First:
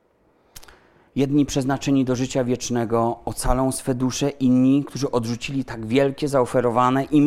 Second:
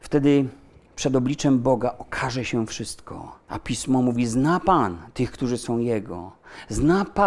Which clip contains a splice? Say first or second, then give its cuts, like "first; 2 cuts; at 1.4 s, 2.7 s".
second; 1 cut; at 3.4 s